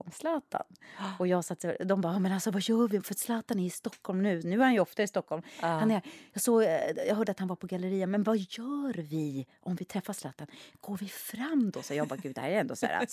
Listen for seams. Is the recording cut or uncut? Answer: uncut